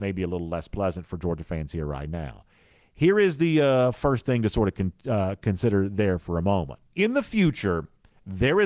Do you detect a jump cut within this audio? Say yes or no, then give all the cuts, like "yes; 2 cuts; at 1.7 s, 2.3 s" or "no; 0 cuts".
yes; 1 cut; at 6.9 s